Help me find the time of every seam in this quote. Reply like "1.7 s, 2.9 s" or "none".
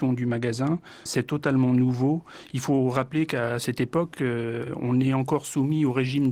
1.1 s